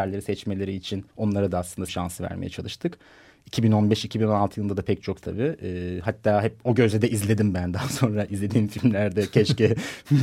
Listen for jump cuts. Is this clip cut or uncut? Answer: cut